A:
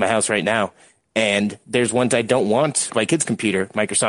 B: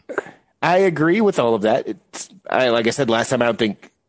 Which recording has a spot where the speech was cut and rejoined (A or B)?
A